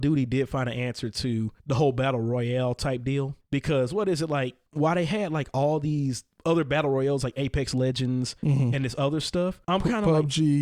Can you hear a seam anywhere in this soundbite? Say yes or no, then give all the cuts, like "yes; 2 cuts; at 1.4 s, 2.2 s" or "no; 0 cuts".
yes; 5 cuts; at 1.6 s, 3.4 s, 4.7 s, 8.4 s, 9.6 s